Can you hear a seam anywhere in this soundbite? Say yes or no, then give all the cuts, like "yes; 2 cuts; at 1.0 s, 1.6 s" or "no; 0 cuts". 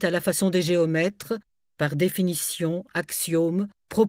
no; 0 cuts